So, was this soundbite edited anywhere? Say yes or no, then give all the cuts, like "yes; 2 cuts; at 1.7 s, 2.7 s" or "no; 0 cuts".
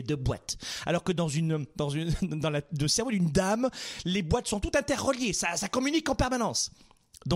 no; 0 cuts